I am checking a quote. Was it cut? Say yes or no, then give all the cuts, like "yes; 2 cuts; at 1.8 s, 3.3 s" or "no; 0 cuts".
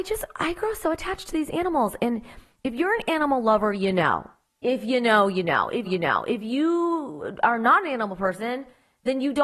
yes; 1 cut; at 5.8 s